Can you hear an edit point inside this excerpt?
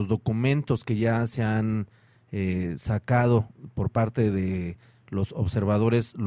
no; 0 cuts

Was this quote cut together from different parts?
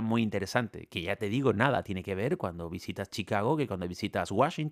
no; 0 cuts

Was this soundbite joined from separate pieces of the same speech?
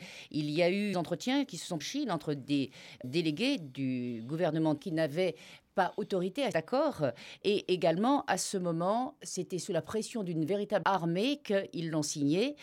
yes; 6 cuts; at 0.9 s, 1.8 s, 3.0 s, 4.8 s, 6.5 s, 10.8 s

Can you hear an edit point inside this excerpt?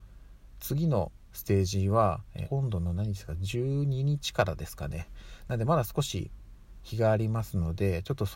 yes; 1 cut; at 2.4 s

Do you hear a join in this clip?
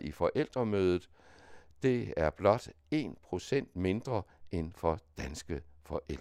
no; 0 cuts

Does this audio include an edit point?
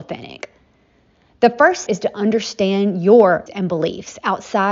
yes; 2 cuts; at 1.9 s, 3.5 s

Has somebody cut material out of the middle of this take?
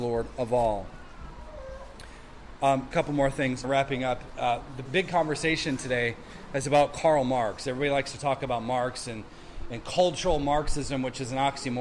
yes; 3 cuts; at 2.9 s, 3.6 s, 4.8 s

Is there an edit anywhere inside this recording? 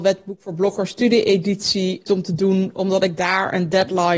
yes; 1 cut; at 2.1 s

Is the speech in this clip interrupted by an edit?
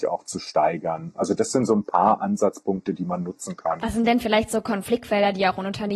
no; 0 cuts

